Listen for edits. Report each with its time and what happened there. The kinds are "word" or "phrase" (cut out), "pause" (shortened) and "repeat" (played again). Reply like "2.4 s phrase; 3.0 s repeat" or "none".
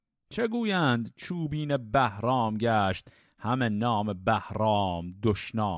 none

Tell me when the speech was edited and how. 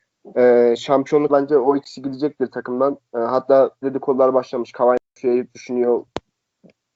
1.3 s word; 3.8 s phrase; 5.1 s pause

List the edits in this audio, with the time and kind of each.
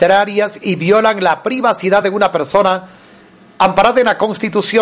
none

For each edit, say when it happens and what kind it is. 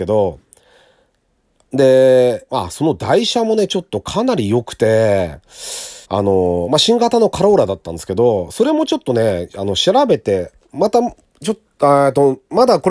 6.0 s pause

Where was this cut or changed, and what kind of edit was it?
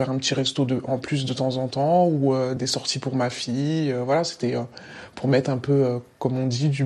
none

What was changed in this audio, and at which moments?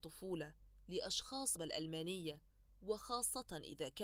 1.6 s phrase

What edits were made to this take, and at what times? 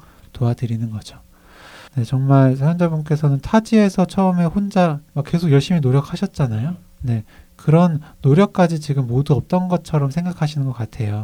1.9 s pause

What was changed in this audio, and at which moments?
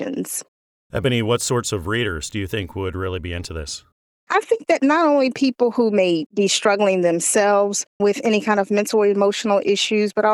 none

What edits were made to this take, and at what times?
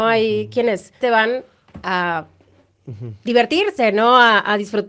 1.0 s word

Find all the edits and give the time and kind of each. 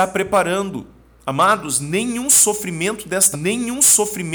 3.3 s repeat

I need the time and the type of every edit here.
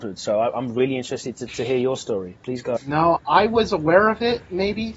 1.5 s word; 2.8 s word; 3.2 s word

